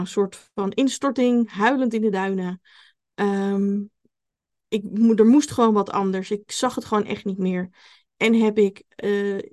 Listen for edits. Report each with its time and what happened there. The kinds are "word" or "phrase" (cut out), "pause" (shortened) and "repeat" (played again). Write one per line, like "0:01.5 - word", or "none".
none